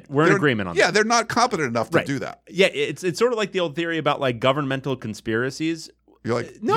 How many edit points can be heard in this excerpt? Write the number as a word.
zero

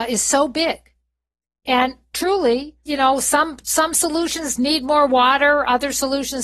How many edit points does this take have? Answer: zero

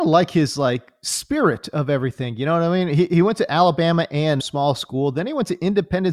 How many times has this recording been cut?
one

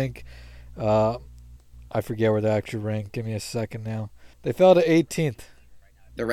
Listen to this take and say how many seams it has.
one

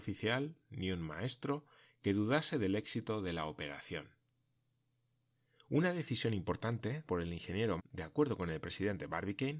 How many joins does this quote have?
two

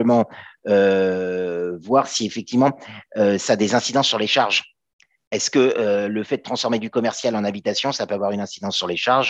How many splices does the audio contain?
zero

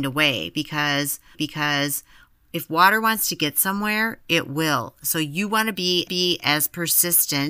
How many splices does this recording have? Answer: two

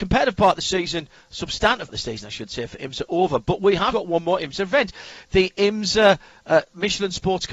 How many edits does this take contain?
two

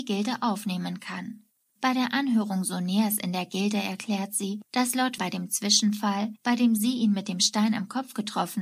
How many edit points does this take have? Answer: three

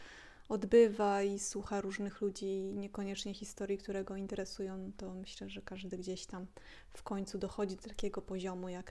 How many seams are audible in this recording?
zero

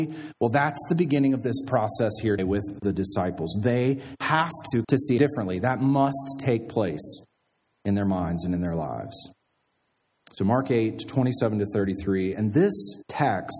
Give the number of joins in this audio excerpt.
three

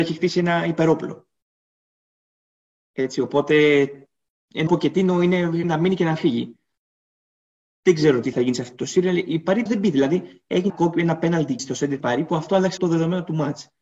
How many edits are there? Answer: eight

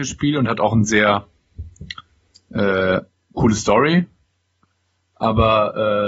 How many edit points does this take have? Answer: zero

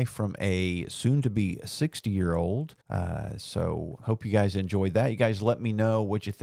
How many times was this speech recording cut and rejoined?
one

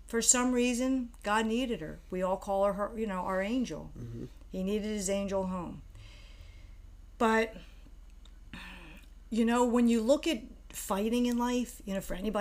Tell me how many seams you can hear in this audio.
zero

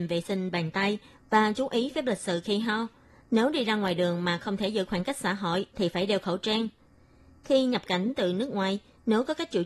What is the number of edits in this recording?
zero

